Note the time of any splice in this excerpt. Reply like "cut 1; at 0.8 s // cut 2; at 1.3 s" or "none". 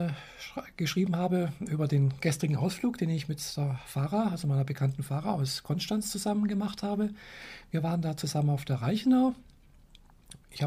none